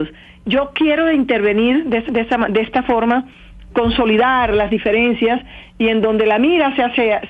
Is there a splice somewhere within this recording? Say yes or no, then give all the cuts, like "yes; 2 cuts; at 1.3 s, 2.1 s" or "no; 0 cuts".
yes; 2 cuts; at 2.1 s, 3.7 s